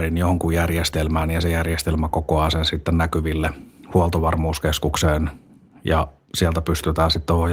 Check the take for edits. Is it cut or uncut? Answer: uncut